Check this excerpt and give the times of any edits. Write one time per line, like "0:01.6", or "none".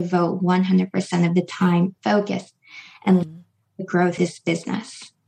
0:02.0
0:03.2
0:04.2